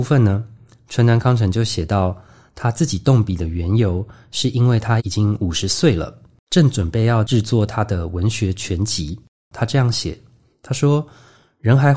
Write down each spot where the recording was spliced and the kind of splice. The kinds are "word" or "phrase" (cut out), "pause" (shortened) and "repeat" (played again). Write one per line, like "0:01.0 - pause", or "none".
none